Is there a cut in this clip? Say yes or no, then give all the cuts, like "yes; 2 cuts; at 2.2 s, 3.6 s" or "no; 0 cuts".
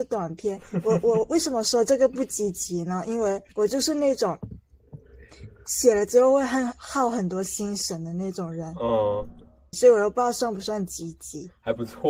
yes; 2 cuts; at 3.5 s, 9.7 s